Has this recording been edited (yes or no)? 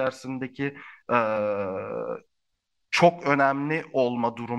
no